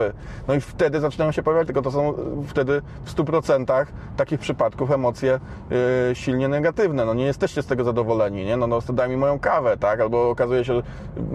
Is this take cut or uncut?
cut